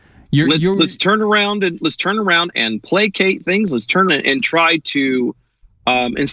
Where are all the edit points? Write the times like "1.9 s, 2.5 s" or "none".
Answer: 2.5 s, 4.1 s